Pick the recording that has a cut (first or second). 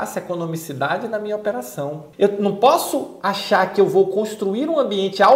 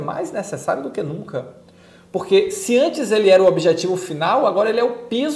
first